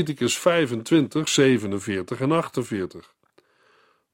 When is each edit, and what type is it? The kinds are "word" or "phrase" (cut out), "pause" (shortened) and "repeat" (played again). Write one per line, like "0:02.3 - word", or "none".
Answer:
0:01.3 - word